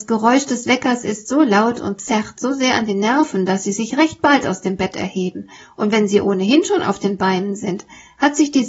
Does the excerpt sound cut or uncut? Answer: uncut